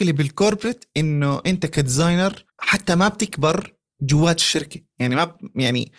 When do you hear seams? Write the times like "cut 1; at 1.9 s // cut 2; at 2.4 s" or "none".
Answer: cut 1; at 2.5 s

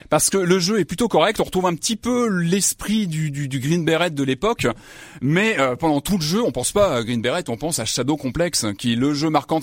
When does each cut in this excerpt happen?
none

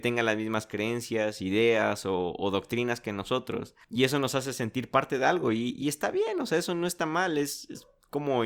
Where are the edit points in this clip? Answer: none

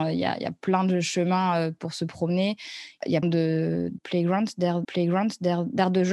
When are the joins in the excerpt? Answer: cut 1; at 3.2 s // cut 2; at 4.8 s

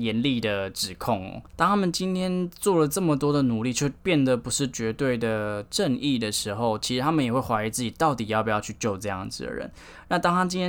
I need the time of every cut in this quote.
none

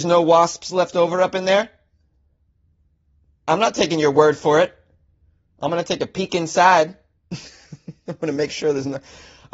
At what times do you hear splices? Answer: none

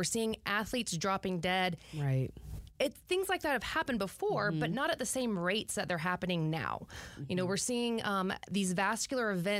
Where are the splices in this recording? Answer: none

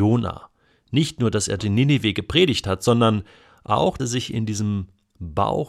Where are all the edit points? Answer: cut 1; at 1.6 s // cut 2; at 4.0 s

